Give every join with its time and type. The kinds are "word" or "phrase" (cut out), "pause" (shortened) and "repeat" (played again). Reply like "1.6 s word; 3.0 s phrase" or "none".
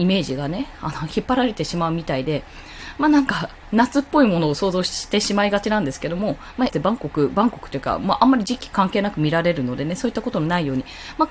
6.7 s word